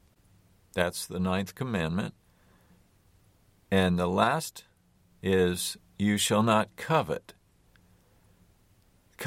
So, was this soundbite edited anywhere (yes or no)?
no